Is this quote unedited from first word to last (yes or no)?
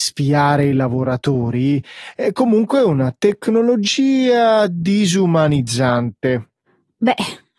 yes